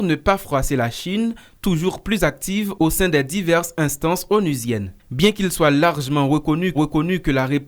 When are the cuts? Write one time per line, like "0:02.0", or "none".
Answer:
0:05.0
0:06.7